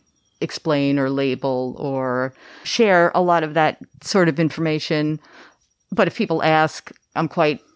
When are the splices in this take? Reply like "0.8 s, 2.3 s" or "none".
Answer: 2.6 s

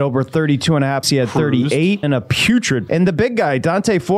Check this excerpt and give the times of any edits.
1.0 s, 2.0 s, 2.9 s

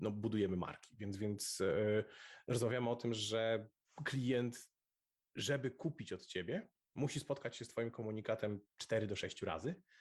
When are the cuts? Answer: 3.8 s

